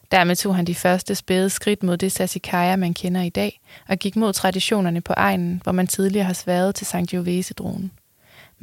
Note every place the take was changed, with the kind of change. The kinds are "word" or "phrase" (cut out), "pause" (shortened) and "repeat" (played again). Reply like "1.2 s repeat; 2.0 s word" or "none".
none